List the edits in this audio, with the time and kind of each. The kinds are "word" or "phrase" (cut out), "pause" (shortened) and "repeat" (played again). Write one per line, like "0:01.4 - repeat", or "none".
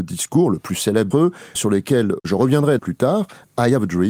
0:01.1 - word
0:01.6 - word
0:02.8 - phrase